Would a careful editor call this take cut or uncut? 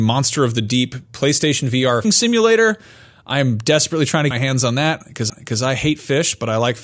cut